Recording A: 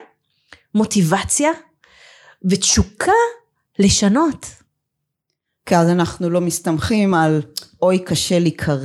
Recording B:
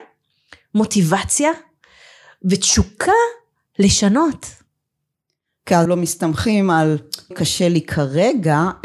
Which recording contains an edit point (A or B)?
B